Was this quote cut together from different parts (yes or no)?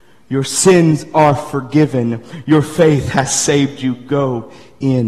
no